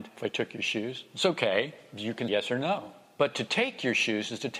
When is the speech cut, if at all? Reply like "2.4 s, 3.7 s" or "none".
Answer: 2.3 s